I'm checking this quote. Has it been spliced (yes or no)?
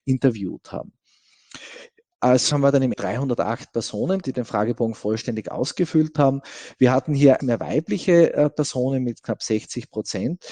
yes